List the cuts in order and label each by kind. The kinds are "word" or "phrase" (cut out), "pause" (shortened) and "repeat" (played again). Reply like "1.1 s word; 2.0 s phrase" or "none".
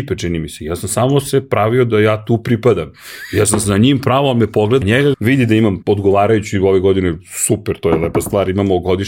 4.8 s word; 5.1 s word; 5.8 s word